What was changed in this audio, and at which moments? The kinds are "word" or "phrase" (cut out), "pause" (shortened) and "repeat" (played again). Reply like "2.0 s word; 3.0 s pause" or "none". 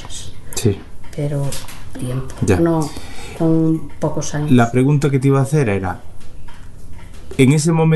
2.0 s word